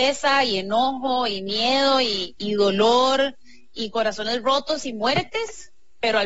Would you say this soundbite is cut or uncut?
uncut